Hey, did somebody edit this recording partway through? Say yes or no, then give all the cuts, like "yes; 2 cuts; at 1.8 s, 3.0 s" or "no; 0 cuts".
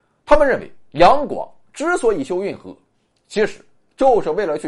no; 0 cuts